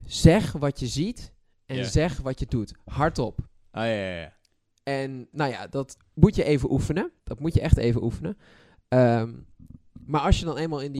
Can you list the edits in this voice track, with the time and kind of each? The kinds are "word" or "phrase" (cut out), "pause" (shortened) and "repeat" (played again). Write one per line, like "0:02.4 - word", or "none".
0:05.3 - word
0:06.0 - word
0:07.2 - pause

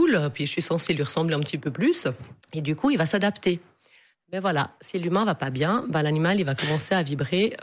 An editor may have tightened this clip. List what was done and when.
0:02.4 - pause

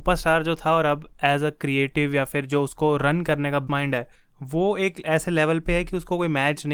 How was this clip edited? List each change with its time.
0:03.7 - word
0:04.1 - pause

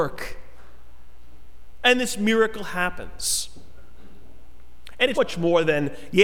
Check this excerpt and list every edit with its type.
0:05.1 - word

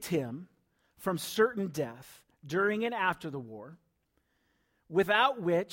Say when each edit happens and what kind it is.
none

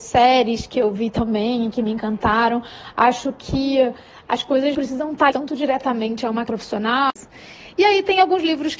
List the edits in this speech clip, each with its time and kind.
0:04.7 - word
0:05.3 - word
0:06.5 - word

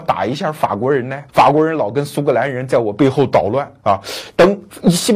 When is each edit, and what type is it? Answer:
0:01.3 - pause

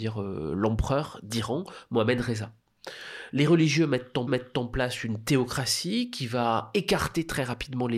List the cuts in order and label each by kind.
0:04.3 - repeat

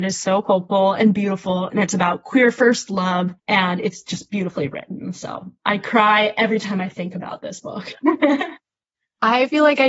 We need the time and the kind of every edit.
0:03.4 - pause

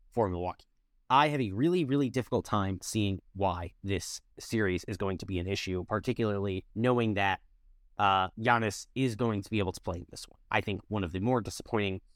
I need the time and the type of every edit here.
0:04.3 - pause
0:06.7 - pause
0:08.3 - pause
0:10.5 - pause

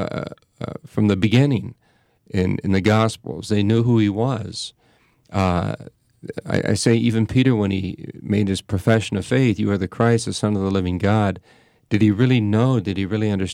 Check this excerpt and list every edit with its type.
none

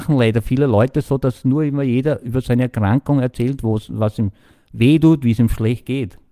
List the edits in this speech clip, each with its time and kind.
none

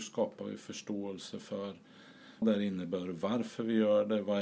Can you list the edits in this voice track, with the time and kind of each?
0:02.4 - word

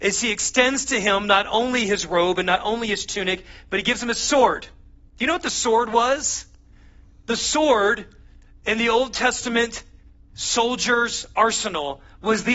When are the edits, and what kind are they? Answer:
0:05.0 - pause

